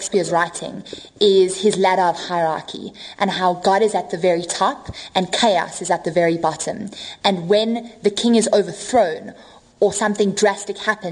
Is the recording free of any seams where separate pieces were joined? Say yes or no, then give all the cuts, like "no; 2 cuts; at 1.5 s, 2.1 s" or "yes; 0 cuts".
yes; 0 cuts